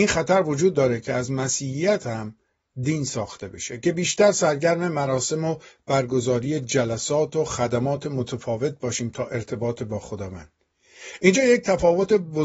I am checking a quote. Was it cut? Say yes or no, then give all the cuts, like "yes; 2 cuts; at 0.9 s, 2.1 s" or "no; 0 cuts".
no; 0 cuts